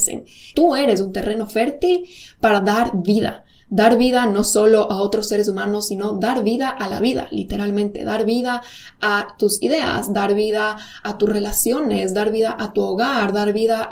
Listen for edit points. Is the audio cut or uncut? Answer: uncut